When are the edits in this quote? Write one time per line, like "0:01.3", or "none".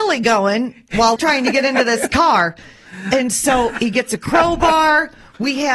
0:01.2